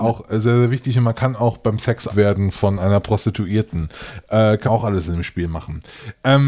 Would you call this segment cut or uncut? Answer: cut